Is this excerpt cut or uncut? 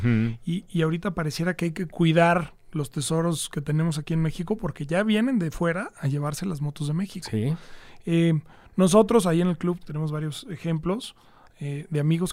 cut